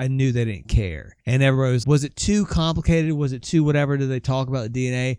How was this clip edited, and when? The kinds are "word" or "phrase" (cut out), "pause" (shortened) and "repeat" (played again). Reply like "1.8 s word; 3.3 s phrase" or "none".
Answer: 1.2 s pause; 1.8 s word